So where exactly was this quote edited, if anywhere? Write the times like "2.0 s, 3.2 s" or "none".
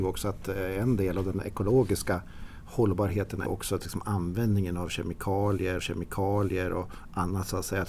3.5 s, 5.8 s